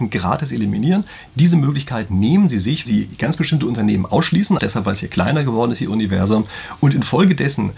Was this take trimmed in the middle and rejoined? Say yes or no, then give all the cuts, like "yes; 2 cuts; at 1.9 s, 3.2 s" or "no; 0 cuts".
yes; 2 cuts; at 2.9 s, 4.6 s